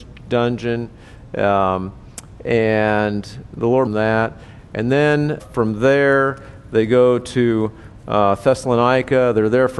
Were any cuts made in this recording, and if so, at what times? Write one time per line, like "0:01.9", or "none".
0:03.9
0:05.4